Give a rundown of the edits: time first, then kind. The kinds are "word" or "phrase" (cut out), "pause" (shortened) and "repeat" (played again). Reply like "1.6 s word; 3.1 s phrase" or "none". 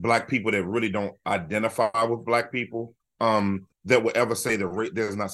3.7 s pause